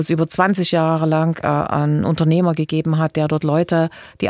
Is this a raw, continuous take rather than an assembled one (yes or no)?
yes